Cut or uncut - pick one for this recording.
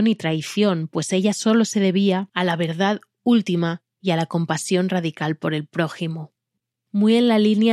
uncut